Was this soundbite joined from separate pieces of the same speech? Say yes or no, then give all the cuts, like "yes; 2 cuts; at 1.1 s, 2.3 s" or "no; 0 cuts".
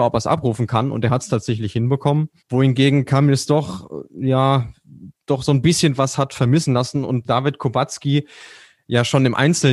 yes; 2 cuts; at 2.4 s, 7.2 s